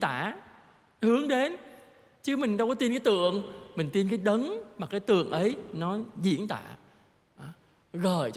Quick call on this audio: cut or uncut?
uncut